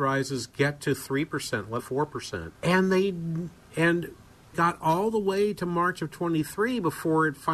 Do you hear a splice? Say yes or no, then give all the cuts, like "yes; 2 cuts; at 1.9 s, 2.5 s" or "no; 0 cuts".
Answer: yes; 3 cuts; at 1.8 s, 2.5 s, 4.5 s